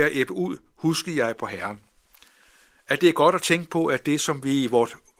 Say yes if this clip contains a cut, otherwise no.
no